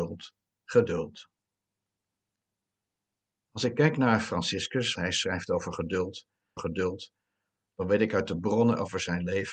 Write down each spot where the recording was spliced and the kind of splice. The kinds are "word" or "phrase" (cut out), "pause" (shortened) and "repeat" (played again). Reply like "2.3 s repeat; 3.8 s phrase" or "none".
5.0 s word; 6.6 s repeat